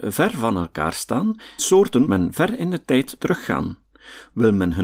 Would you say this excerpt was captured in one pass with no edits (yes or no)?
no